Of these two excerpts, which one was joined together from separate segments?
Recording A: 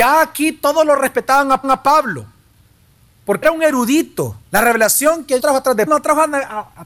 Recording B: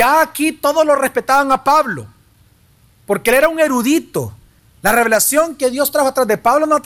A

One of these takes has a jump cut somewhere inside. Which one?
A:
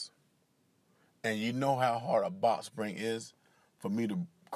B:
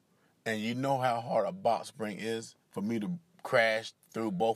B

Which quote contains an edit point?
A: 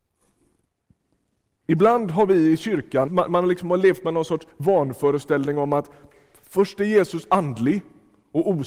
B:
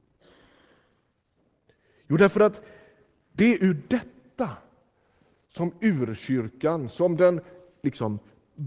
A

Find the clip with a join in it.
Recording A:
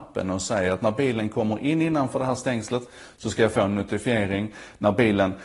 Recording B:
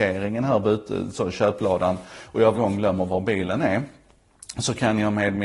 B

